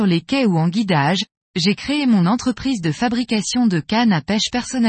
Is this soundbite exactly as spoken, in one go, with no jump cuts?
yes; 0 cuts

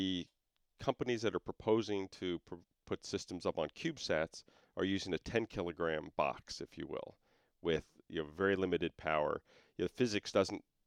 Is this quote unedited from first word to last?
yes; 0 cuts

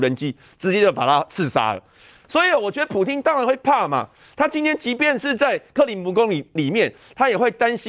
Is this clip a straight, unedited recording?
yes; 0 cuts

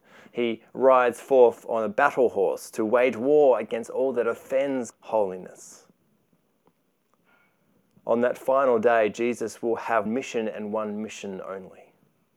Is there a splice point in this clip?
yes; 2 cuts; at 4.9 s, 10.1 s

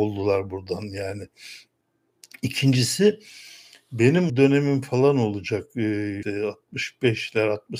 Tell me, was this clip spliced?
yes; 2 cuts; at 4.3 s, 6.2 s

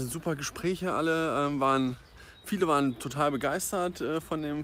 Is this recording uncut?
yes; 0 cuts

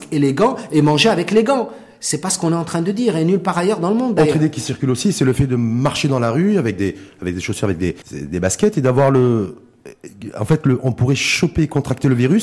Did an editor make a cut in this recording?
yes; 1 cut; at 8.0 s

